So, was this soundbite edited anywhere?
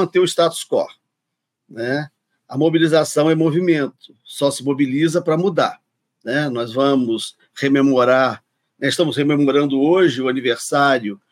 no; 0 cuts

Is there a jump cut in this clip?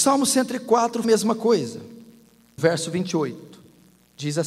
yes; 2 cuts; at 1.0 s, 2.6 s

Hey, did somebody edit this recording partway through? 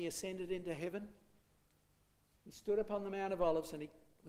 no; 0 cuts

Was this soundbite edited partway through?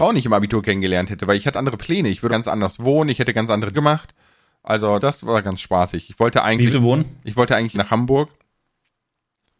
yes; 6 cuts; at 1.5 s, 2.3 s, 3.7 s, 5.0 s, 6.7 s, 7.7 s

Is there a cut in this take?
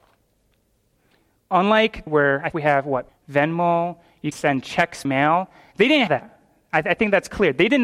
yes; 6 cuts; at 2.1 s, 2.5 s, 3.1 s, 4.3 s, 5.0 s, 6.1 s

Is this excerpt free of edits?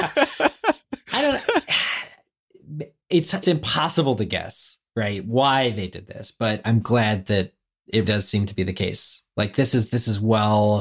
no; 3 cuts; at 3.4 s, 6.6 s, 8.0 s

